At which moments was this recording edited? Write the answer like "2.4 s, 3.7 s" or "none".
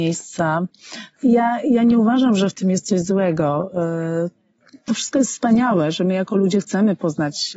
none

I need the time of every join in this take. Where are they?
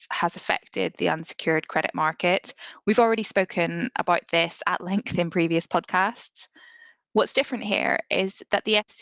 none

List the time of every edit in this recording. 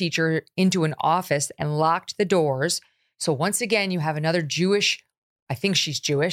none

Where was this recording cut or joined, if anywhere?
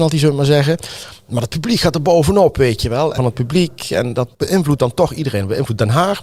3.2 s, 4.3 s

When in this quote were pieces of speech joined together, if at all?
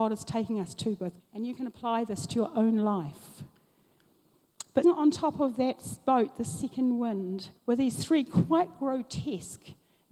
1.2 s, 4.8 s, 7.6 s

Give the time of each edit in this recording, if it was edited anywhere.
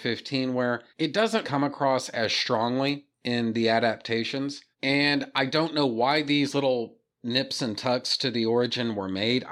0.9 s, 1.4 s, 3.1 s, 4.7 s

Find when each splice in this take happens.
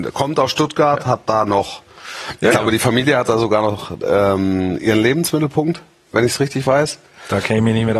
none

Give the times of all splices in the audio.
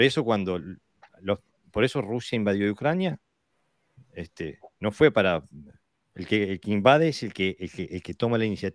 none

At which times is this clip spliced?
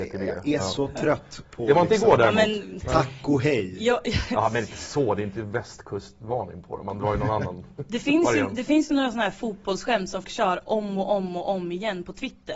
10.2 s

